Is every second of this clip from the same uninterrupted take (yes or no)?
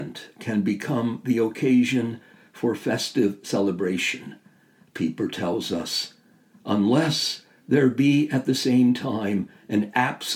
yes